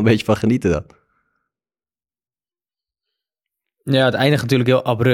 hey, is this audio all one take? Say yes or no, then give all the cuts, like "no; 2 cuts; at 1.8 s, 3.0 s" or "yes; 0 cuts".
yes; 0 cuts